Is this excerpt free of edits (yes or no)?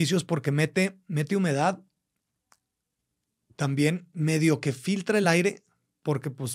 yes